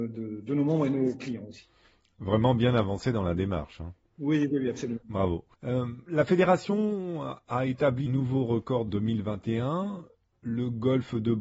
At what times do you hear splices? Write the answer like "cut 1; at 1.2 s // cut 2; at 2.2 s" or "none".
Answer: cut 1; at 5.5 s // cut 2; at 8.1 s // cut 3; at 8.9 s